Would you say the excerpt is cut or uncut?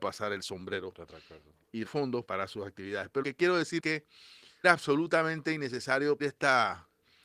cut